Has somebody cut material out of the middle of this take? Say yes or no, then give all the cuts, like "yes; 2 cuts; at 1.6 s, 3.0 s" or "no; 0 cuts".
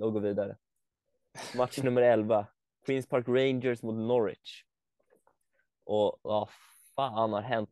no; 0 cuts